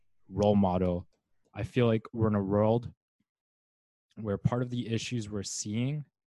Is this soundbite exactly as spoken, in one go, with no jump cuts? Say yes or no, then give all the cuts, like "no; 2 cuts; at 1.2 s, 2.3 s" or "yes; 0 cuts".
yes; 0 cuts